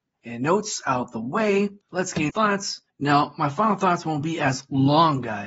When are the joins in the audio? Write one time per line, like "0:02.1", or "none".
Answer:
0:01.8
0:02.3
0:02.9